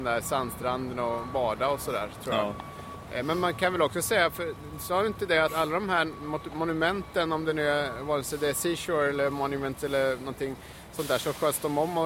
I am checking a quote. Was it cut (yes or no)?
yes